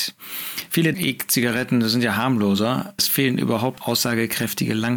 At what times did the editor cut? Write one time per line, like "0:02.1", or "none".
0:00.9
0:03.0
0:03.8